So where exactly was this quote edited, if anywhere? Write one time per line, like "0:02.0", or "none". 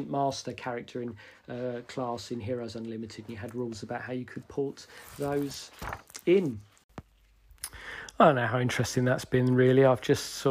none